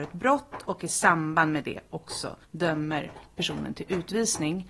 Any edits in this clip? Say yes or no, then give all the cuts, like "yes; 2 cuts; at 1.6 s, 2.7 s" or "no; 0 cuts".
yes; 1 cut; at 2.4 s